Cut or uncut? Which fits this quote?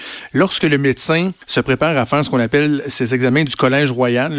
cut